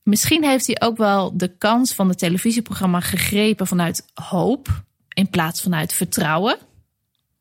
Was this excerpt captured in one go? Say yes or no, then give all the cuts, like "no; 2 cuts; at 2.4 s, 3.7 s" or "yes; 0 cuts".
yes; 0 cuts